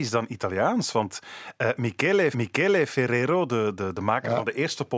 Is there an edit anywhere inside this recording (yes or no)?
yes